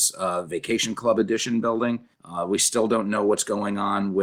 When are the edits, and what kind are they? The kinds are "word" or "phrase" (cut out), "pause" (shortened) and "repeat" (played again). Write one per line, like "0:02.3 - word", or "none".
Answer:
0:02.1 - pause